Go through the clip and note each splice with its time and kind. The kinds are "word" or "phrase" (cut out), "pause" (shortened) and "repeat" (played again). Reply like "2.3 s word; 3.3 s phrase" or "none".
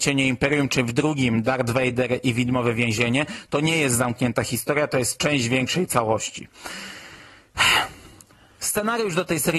none